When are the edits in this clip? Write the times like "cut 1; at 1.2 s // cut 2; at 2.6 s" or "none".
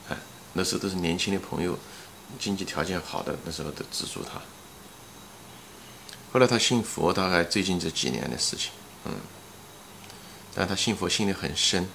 cut 1; at 2.4 s